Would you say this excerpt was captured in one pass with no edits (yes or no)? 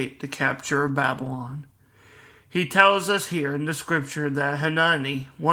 yes